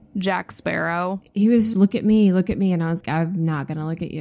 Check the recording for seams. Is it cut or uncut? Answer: cut